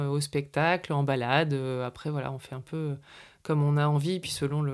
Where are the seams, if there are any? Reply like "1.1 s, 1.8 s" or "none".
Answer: none